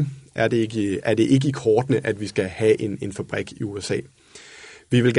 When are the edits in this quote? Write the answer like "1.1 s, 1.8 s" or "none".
none

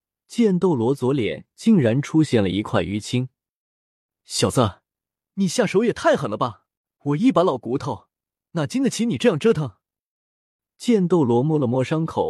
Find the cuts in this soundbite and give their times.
6.8 s

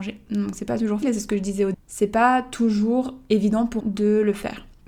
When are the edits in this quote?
1.0 s, 1.7 s, 3.8 s

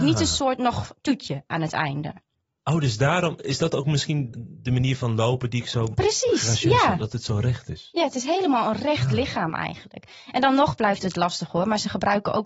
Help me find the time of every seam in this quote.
4.3 s

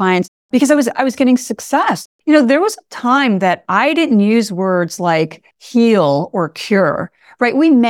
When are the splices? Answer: 2.1 s, 5.5 s

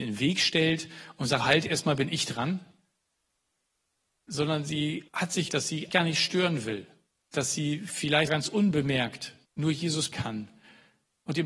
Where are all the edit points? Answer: 1.4 s, 5.1 s, 5.5 s, 5.9 s, 7.1 s, 8.3 s, 9.4 s, 10.1 s

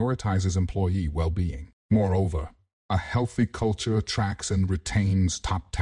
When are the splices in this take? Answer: 1.8 s

